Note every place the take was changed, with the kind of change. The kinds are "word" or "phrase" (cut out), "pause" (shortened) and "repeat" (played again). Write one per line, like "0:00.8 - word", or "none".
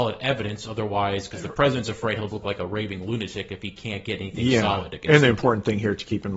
0:02.3 - word